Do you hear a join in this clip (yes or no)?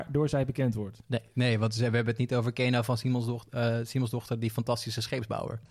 no